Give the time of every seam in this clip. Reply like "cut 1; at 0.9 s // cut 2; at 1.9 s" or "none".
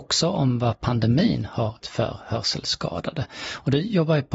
cut 1; at 1.8 s